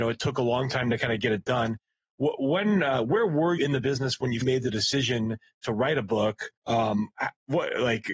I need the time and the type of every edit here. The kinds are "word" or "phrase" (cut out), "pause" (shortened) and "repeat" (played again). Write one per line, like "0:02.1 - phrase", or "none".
0:03.6 - word
0:04.4 - word
0:06.6 - pause